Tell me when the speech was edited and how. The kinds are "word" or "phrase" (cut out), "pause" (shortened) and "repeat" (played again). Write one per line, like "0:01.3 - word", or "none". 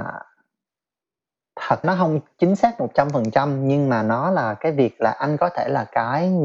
0:01.8 - word